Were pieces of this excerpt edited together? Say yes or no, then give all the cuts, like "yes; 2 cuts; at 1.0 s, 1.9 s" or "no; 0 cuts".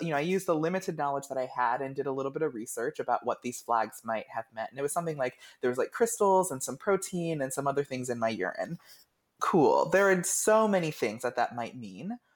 no; 0 cuts